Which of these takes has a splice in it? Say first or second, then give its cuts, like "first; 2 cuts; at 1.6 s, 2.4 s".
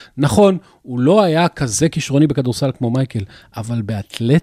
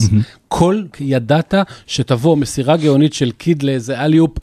second; 1 cut; at 0.9 s